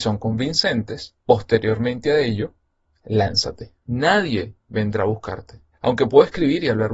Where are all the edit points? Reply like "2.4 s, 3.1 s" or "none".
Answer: 1.2 s, 3.8 s, 5.7 s